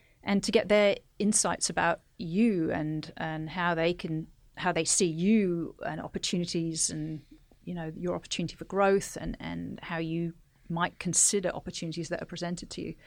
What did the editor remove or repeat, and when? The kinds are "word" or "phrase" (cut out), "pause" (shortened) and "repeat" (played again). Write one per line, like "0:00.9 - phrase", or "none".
none